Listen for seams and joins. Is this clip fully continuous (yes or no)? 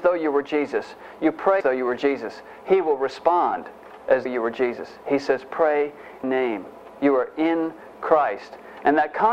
no